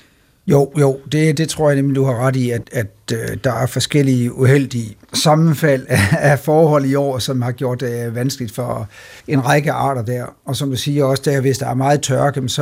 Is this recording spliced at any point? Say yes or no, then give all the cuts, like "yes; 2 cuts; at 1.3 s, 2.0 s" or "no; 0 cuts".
yes; 4 cuts; at 1.4 s, 2.6 s, 5.0 s, 9.2 s